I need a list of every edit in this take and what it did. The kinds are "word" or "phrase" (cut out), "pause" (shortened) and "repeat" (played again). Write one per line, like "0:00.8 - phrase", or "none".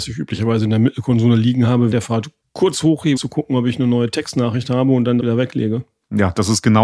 0:01.9 - word
0:02.4 - pause
0:03.2 - word
0:05.2 - word